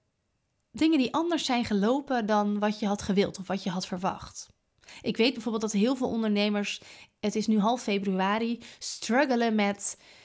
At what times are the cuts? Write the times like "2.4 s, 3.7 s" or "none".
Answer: none